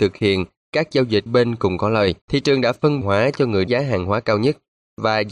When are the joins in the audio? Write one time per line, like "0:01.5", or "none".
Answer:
0:01.3
0:02.2
0:03.0
0:03.7